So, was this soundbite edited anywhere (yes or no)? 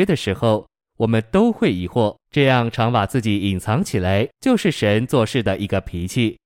yes